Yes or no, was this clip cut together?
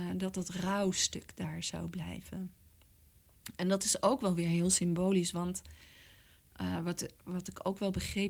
no